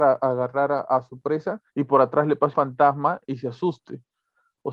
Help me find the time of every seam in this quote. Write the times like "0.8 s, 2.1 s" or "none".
1.7 s, 2.5 s